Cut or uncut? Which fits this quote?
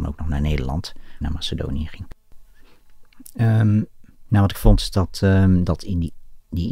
cut